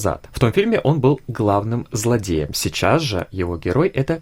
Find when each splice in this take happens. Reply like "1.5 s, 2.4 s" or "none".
none